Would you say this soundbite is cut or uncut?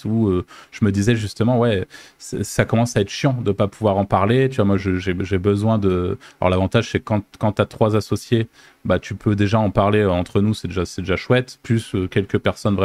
uncut